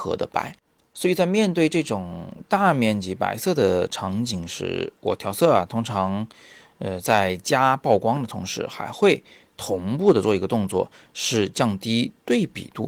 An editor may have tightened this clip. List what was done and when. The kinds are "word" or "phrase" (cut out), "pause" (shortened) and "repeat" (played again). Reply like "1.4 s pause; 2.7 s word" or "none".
none